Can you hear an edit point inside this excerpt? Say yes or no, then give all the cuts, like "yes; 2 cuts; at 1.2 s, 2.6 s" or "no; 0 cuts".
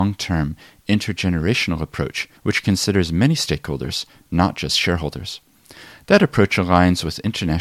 yes; 1 cut; at 2.4 s